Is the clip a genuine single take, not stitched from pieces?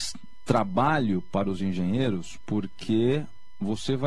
yes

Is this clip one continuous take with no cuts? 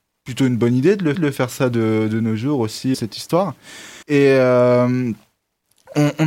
no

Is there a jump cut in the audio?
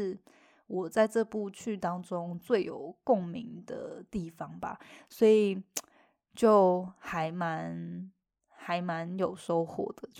no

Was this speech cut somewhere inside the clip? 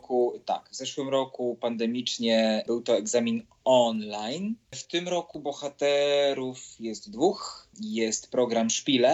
no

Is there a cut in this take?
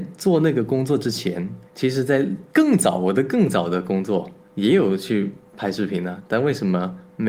yes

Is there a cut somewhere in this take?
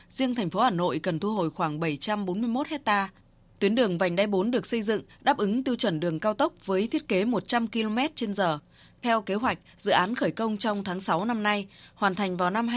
no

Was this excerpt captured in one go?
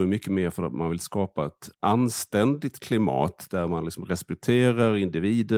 no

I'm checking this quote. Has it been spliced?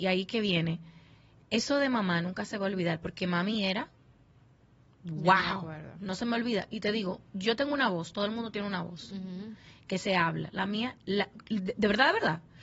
no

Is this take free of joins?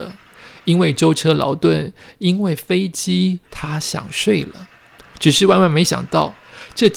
no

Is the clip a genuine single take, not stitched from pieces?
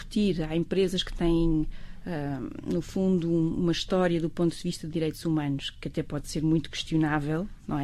yes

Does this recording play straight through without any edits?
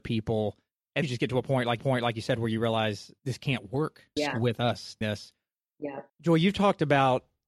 no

